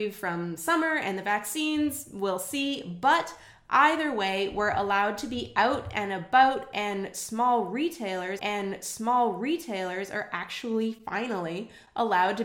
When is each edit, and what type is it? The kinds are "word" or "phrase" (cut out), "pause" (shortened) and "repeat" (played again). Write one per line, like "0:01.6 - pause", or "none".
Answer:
0:08.4 - repeat